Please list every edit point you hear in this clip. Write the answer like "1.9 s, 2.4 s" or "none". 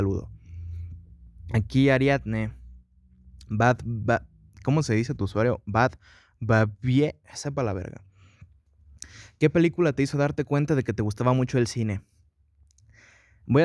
none